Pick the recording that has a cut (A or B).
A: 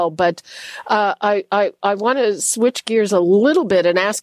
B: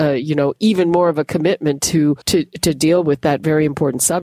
B